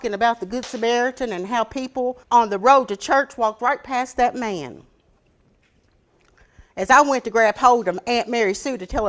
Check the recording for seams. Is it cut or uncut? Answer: cut